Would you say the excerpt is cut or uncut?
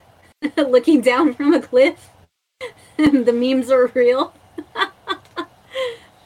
uncut